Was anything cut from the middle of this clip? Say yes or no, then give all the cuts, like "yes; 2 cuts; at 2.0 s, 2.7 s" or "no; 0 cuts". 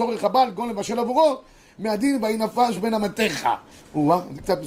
no; 0 cuts